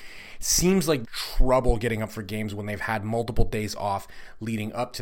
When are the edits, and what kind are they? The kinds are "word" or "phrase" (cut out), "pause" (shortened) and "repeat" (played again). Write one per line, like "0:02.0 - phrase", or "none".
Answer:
0:01.0 - phrase